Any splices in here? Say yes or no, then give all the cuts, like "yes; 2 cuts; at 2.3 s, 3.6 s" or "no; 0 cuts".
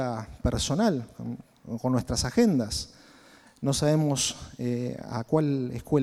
no; 0 cuts